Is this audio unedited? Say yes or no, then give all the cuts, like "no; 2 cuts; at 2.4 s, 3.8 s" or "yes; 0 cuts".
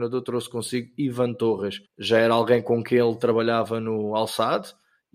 no; 1 cut; at 1.9 s